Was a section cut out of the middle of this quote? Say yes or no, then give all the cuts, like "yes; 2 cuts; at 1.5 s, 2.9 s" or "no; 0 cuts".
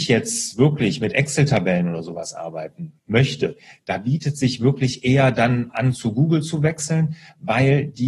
no; 0 cuts